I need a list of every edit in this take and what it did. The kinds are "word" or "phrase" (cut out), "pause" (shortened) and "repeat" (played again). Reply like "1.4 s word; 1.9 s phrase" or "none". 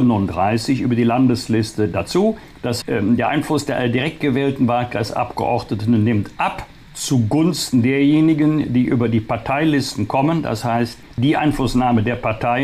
2.8 s word